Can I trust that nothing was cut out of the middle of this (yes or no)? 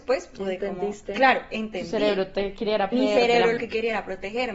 no